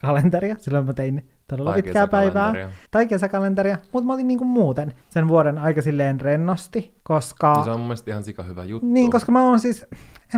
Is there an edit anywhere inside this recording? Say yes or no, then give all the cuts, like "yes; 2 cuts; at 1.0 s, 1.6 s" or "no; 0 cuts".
yes; 2 cuts; at 2.9 s, 5.0 s